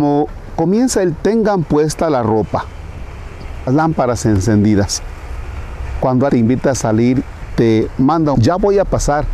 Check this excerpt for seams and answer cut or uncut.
cut